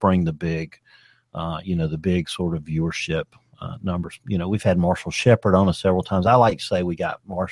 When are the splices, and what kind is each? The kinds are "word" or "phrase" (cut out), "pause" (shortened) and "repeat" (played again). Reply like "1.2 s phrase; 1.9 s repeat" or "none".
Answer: none